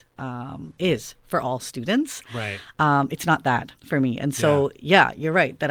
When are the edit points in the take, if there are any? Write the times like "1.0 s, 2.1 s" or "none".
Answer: 3.8 s